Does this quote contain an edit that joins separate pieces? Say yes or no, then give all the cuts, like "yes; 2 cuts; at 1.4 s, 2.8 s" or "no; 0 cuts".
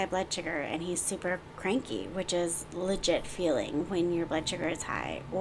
no; 0 cuts